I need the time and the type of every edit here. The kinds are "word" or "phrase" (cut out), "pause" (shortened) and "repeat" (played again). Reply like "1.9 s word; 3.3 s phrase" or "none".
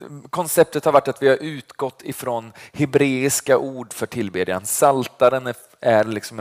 none